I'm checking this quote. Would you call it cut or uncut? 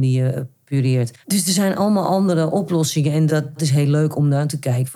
cut